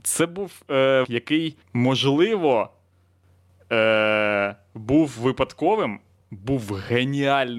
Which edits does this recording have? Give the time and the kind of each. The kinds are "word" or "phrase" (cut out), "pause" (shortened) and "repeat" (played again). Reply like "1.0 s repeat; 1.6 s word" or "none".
1.0 s word; 1.6 s pause; 6.2 s phrase